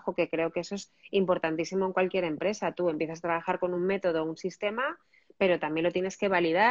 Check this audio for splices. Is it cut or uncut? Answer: uncut